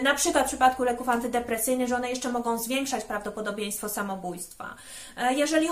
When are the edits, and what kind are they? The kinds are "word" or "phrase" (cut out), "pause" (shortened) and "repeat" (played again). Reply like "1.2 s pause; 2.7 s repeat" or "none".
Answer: none